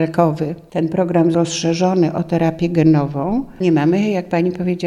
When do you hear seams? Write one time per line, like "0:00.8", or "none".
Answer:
0:01.3
0:03.6